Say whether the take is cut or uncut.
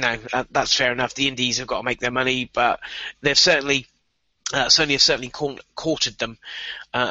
uncut